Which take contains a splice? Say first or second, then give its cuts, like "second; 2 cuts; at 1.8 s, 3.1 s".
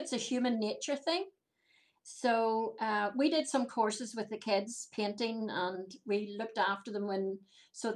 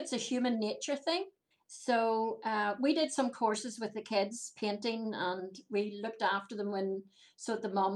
second; 1 cut; at 1.5 s